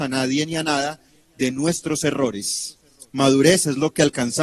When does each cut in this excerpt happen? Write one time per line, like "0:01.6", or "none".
none